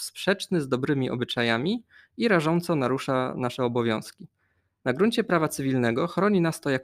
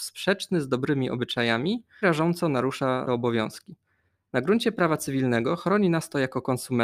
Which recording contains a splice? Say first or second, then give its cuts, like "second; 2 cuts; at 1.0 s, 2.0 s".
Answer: second; 2 cuts; at 2.0 s, 3.1 s